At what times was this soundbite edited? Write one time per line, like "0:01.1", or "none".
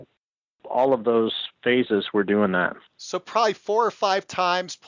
0:02.9